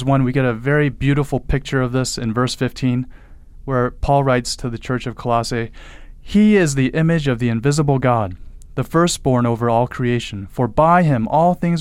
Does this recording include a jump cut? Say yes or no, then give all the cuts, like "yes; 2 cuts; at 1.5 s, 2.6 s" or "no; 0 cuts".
no; 0 cuts